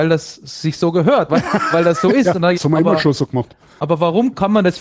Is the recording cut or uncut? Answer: cut